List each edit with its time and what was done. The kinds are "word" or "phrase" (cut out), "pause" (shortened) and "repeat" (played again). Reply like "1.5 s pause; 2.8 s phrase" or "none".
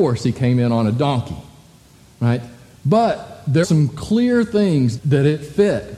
3.6 s word; 5.0 s word